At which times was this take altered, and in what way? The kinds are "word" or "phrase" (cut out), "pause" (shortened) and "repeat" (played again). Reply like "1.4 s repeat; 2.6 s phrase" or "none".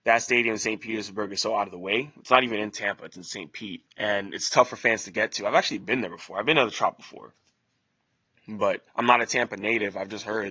3.9 s pause; 8.9 s pause